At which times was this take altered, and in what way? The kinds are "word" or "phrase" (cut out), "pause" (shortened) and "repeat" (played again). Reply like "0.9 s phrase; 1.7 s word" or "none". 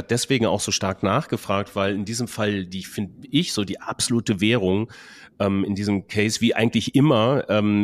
none